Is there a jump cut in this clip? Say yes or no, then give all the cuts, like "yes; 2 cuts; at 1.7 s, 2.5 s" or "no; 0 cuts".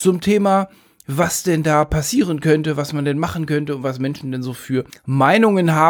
yes; 1 cut; at 4.9 s